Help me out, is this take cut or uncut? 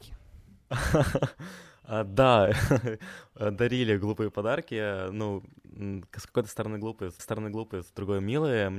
cut